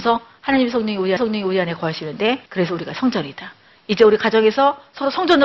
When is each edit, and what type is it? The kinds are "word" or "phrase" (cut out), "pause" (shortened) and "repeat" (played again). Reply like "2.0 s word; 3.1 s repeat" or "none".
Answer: 1.2 s repeat; 2.5 s pause